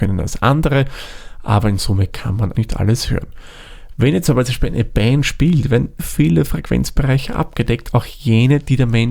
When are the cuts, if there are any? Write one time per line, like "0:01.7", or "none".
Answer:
0:02.5
0:06.0